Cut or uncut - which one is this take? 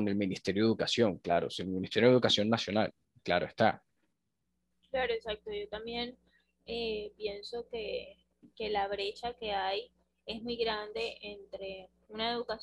uncut